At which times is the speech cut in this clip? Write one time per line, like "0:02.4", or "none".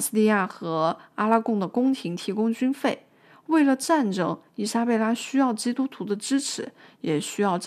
none